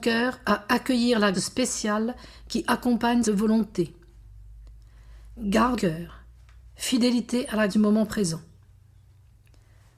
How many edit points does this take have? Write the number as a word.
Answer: four